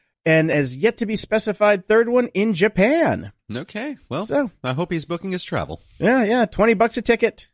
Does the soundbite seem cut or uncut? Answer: uncut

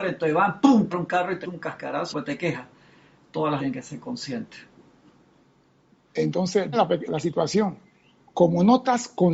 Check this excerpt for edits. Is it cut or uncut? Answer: cut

